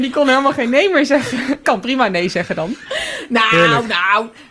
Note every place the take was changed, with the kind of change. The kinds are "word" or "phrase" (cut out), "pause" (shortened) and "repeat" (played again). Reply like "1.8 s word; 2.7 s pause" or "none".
1.6 s word